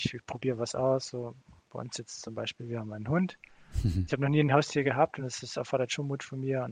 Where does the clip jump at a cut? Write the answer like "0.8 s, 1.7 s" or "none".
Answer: none